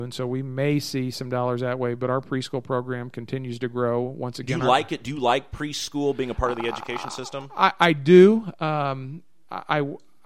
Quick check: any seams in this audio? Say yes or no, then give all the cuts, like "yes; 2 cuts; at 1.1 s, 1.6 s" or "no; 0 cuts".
no; 0 cuts